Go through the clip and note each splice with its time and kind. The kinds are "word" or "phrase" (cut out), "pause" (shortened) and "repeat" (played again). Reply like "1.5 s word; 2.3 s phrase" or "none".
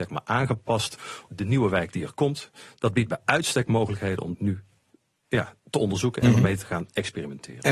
1.3 s word; 4.3 s word